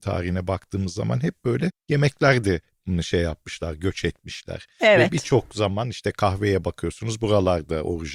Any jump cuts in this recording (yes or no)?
no